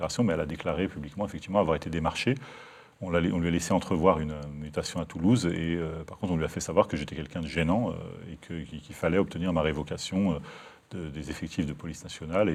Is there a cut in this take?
no; 0 cuts

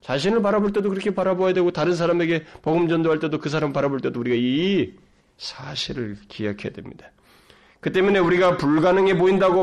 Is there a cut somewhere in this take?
no; 0 cuts

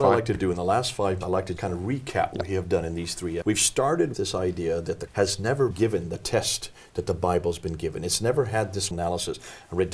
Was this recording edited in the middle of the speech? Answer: yes; 8 cuts; at 1.2 s, 1.6 s, 2.3 s, 3.4 s, 4.1 s, 5.1 s, 5.7 s, 8.9 s

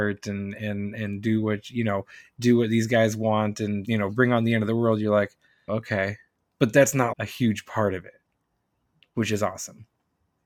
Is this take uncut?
no; 3 cuts; at 3.8 s, 5.7 s, 7.1 s

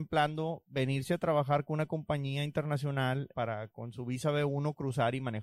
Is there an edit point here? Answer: yes; 1 cut; at 3.3 s

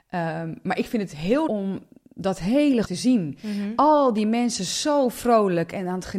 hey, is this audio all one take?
no; 2 cuts; at 1.5 s, 2.8 s

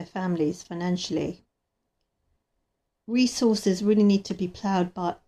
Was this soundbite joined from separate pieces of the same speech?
no; 0 cuts

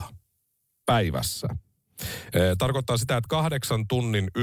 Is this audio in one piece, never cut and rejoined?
yes; 0 cuts

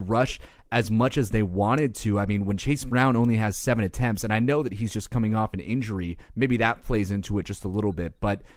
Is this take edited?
yes; 1 cut; at 6.3 s

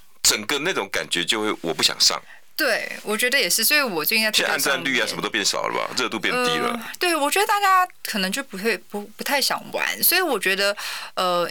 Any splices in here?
no; 0 cuts

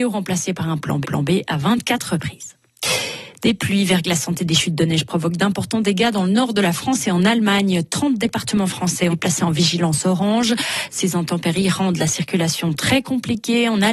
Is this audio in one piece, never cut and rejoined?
no; 2 cuts; at 1.0 s, 9.1 s

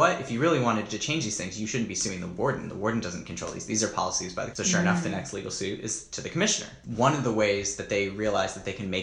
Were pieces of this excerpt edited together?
yes; 1 cut; at 4.5 s

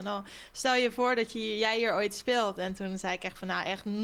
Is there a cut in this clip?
no; 0 cuts

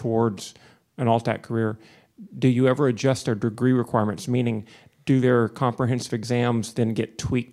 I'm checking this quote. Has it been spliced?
no; 0 cuts

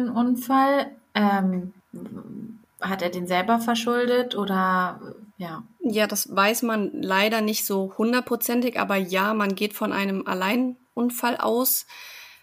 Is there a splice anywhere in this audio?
yes; 1 cut; at 5.3 s

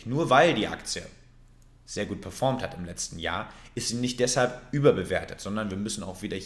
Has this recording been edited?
no; 0 cuts

